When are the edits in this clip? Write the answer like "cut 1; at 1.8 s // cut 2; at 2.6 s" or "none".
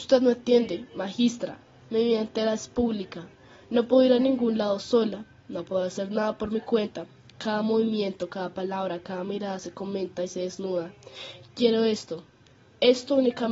none